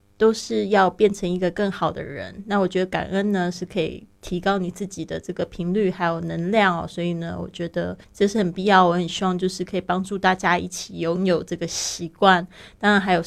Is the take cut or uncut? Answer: cut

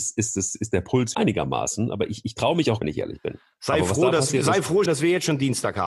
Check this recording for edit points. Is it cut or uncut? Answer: cut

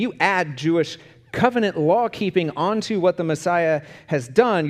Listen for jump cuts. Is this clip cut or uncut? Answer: uncut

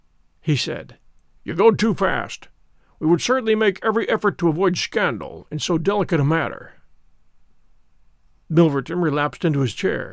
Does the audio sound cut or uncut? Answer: uncut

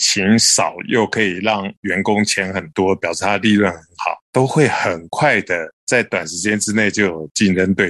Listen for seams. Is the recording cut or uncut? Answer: cut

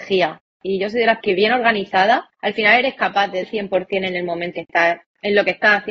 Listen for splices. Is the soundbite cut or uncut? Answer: cut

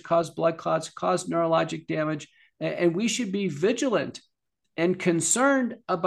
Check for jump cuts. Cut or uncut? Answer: uncut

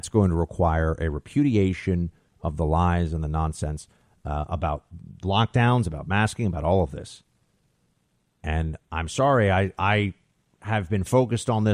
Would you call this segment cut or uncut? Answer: uncut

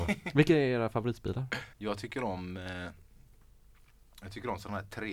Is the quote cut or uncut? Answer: cut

